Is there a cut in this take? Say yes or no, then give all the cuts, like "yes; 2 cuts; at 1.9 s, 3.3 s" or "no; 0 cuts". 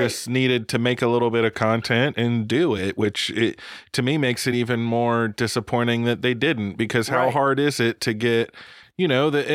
no; 0 cuts